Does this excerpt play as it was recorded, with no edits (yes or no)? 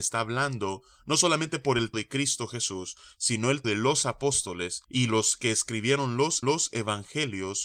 no